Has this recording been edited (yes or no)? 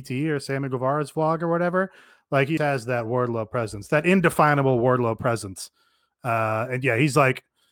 yes